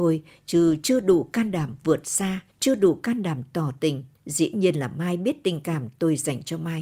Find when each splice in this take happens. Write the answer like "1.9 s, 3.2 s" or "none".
2.5 s, 4.1 s

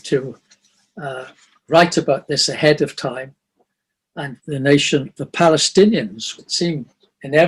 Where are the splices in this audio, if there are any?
4.4 s, 5.2 s, 6.4 s

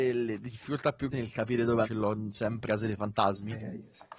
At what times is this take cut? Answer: 1.1 s, 1.8 s, 2.7 s

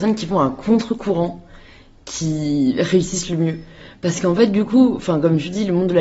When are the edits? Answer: none

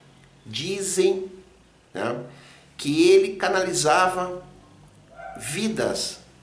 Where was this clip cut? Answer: none

